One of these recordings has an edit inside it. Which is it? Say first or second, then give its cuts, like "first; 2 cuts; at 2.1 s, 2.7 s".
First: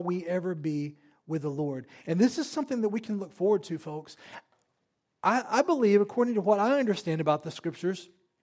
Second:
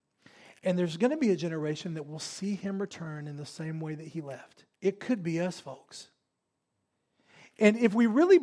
second; 1 cut; at 4.7 s